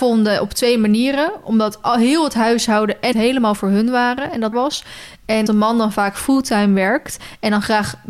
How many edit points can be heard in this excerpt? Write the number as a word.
three